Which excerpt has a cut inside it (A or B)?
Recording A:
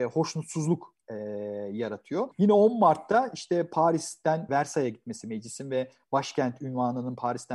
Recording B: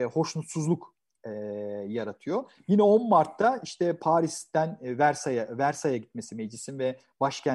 A